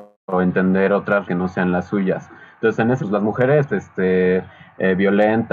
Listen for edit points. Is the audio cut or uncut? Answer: cut